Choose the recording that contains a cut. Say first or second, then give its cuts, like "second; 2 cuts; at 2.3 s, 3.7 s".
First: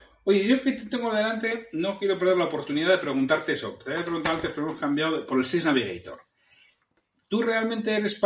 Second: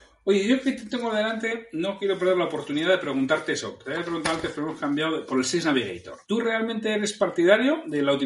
second; 1 cut; at 6.2 s